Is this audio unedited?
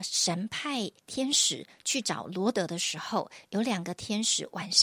no; 1 cut; at 1.0 s

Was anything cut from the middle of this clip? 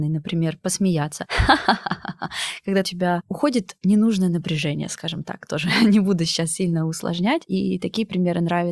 yes; 1 cut; at 2.8 s

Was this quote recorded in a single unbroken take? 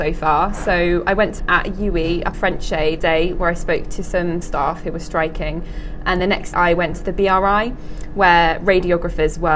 no; 7 cuts; at 1.4 s, 2.3 s, 3.0 s, 4.4 s, 6.2 s, 6.5 s, 6.9 s

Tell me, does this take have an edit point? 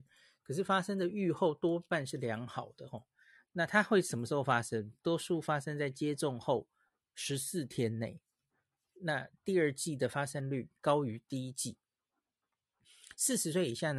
no; 0 cuts

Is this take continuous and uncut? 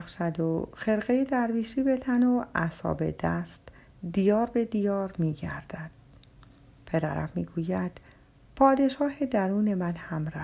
yes; 0 cuts

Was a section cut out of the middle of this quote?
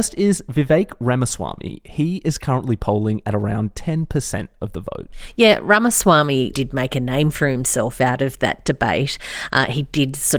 yes; 1 cut; at 6.5 s

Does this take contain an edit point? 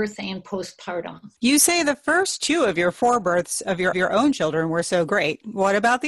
yes; 2 cuts; at 1.4 s, 3.9 s

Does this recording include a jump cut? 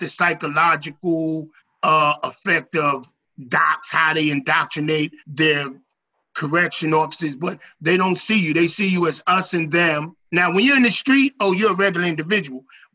yes; 3 cuts; at 1.6 s, 5.2 s, 10.3 s

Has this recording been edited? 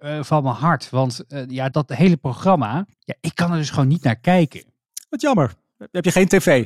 yes; 2 cuts; at 1.7 s, 2.9 s

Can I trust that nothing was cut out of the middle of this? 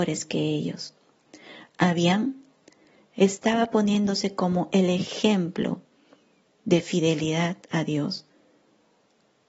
yes; 0 cuts

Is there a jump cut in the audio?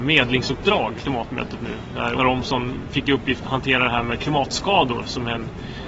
yes; 3 cuts; at 1.0 s, 2.2 s, 3.4 s

